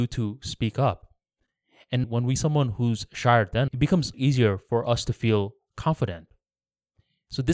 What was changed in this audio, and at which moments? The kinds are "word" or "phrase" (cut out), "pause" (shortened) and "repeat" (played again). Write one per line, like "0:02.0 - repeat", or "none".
0:02.0 - word
0:02.4 - word
0:03.7 - word
0:04.1 - word